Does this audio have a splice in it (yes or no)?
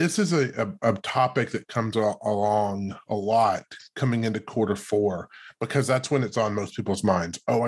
no